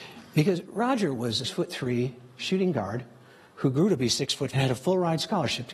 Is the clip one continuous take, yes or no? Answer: no